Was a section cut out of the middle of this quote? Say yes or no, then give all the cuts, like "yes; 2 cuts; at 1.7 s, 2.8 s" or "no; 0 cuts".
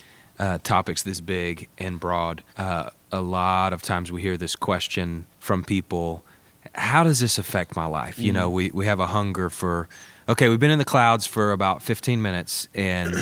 yes; 2 cuts; at 2.5 s, 5.3 s